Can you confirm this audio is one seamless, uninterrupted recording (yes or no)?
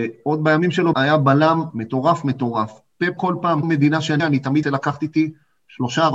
no